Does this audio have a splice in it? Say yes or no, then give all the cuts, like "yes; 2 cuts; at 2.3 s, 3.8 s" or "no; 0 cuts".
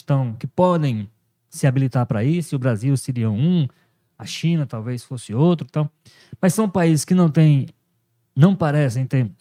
no; 0 cuts